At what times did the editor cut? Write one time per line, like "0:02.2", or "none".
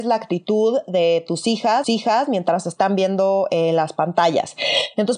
0:01.8